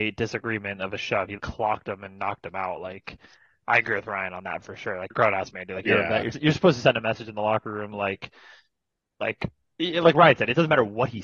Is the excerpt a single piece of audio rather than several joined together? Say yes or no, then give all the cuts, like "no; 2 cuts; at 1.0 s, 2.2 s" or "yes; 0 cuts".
no; 3 cuts; at 1.4 s, 5.1 s, 6.3 s